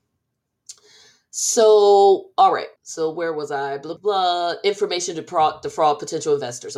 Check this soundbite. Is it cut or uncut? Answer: cut